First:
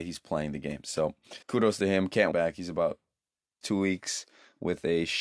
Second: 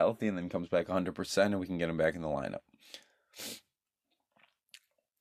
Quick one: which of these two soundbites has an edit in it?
first; 3 cuts; at 1.4 s, 2.3 s, 3.6 s

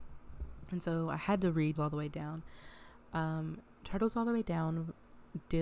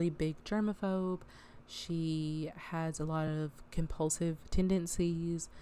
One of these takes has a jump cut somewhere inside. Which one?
first; 1 cut; at 1.8 s

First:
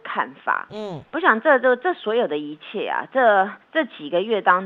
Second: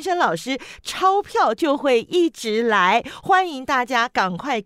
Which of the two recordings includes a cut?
first; 1 cut; at 3.6 s

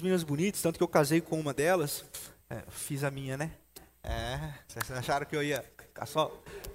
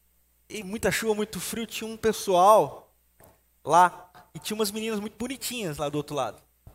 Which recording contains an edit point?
first; 1 cut; at 5.8 s

